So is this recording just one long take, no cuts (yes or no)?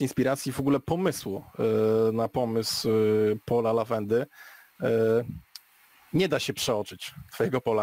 yes